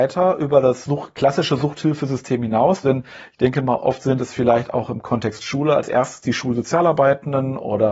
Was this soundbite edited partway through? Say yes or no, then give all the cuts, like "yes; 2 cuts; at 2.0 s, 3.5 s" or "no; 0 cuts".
no; 0 cuts